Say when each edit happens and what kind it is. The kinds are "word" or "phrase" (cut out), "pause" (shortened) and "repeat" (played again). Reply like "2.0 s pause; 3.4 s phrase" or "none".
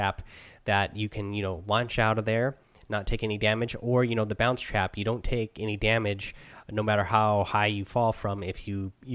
none